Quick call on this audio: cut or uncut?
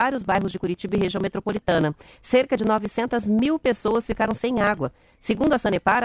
uncut